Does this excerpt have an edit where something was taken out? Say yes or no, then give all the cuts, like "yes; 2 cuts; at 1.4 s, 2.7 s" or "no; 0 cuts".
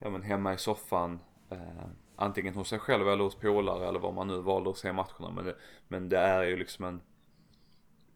yes; 1 cut; at 2.0 s